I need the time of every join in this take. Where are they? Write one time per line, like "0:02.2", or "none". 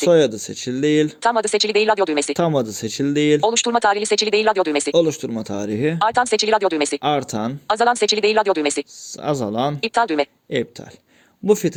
none